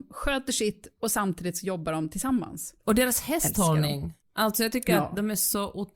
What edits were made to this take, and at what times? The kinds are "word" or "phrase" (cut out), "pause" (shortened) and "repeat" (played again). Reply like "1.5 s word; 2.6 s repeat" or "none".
2.8 s pause; 4.2 s pause